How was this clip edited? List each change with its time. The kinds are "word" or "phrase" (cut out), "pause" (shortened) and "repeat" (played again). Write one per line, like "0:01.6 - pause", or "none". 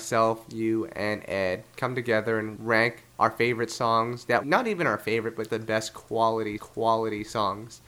0:02.6 - word
0:03.1 - pause
0:04.4 - word
0:05.5 - word
0:06.6 - repeat